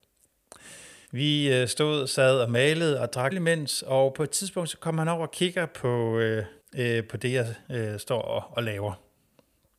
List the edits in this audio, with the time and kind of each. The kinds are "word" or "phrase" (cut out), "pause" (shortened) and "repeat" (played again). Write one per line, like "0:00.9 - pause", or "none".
0:01.1 - pause
0:03.3 - phrase
0:06.6 - pause
0:07.6 - pause